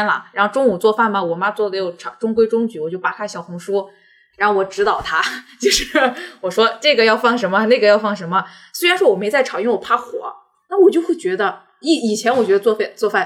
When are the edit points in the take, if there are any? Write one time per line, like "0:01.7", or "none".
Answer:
none